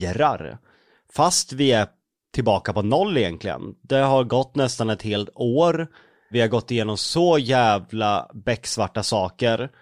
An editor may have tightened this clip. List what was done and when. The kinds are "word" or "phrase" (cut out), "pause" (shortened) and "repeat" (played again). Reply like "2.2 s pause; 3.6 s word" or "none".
none